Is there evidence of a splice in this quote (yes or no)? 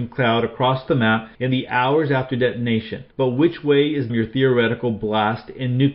yes